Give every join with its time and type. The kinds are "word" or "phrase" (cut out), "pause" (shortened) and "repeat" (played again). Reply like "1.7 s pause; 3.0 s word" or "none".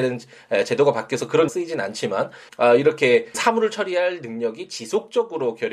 1.5 s word; 2.5 s word; 3.3 s word